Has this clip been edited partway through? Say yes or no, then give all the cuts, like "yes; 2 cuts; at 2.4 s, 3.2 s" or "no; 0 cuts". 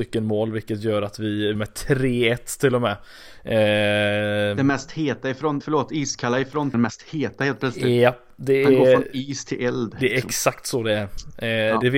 yes; 3 cuts; at 1.6 s, 5.6 s, 6.7 s